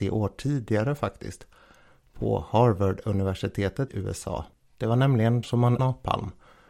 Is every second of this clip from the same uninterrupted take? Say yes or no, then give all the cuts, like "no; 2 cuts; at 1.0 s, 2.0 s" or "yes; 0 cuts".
no; 3 cuts; at 3.9 s, 5.4 s, 5.8 s